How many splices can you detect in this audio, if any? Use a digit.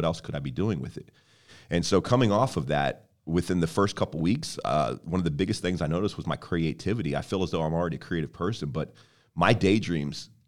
0